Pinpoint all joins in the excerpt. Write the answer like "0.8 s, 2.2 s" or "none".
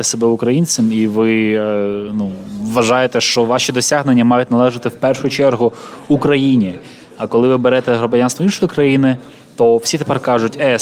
none